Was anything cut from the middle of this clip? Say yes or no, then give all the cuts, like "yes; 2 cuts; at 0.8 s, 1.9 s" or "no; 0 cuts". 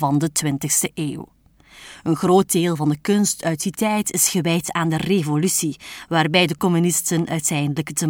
no; 0 cuts